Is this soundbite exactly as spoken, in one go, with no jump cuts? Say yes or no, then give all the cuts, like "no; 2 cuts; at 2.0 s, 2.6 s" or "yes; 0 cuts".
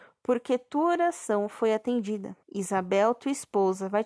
no; 1 cut; at 2.4 s